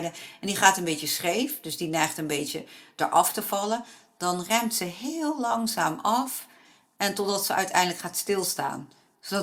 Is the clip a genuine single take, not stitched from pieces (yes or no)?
yes